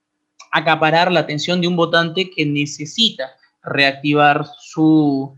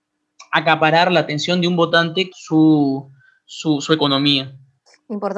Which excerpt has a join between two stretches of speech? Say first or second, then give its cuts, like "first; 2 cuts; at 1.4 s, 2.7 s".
second; 1 cut; at 2.3 s